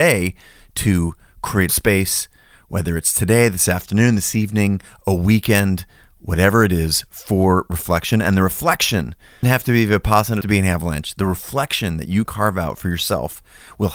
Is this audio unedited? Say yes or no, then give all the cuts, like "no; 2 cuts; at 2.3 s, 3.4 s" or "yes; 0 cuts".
no; 4 cuts; at 1.7 s, 9.4 s, 10.4 s, 12.3 s